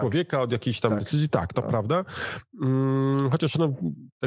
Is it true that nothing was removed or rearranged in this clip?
no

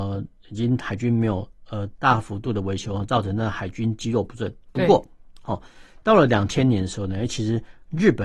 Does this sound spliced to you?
no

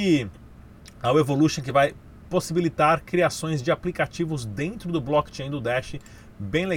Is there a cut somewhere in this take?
no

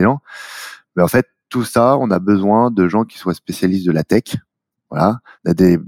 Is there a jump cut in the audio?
no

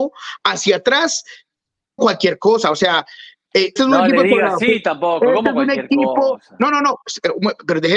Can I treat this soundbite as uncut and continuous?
no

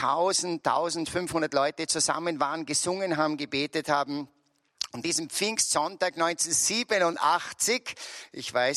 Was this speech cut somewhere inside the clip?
yes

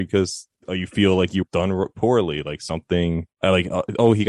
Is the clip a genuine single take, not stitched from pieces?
no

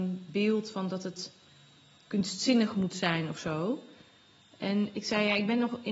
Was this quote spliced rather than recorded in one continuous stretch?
no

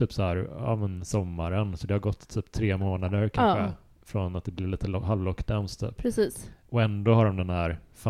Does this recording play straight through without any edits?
yes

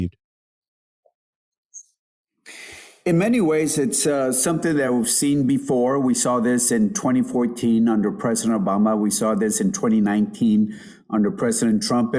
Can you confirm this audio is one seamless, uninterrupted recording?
yes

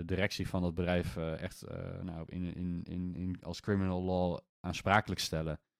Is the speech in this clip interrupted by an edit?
no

